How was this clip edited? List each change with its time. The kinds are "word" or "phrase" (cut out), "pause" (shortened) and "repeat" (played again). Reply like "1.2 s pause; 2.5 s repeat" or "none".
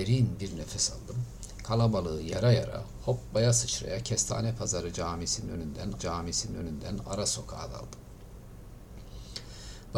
6.0 s repeat